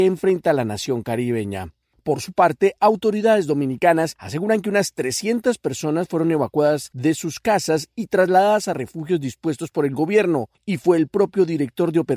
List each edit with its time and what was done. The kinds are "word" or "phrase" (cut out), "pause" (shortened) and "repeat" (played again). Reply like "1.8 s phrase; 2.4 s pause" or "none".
none